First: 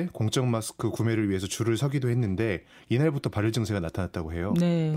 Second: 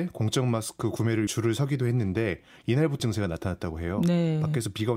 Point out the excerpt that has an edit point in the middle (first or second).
second